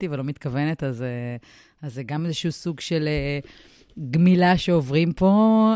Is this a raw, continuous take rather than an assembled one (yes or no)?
yes